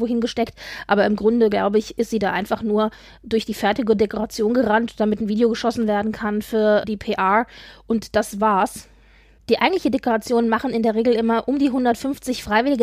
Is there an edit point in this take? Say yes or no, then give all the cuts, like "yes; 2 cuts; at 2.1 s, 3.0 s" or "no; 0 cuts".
no; 0 cuts